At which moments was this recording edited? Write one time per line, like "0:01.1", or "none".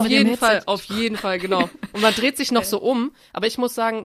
none